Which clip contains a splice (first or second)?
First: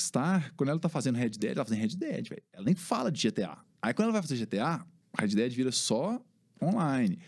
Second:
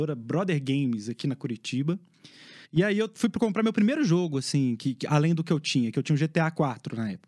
second